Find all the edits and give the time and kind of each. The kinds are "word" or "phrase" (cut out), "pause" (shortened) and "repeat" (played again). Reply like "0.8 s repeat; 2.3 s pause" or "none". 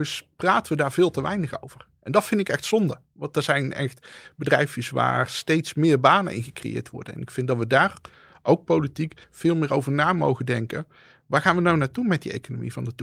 9.2 s pause